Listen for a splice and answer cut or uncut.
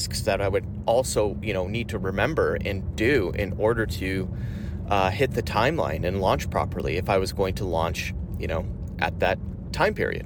uncut